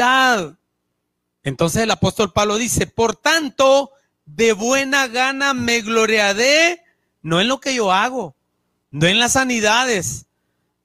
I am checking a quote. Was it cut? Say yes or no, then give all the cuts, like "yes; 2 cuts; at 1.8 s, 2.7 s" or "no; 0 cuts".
no; 0 cuts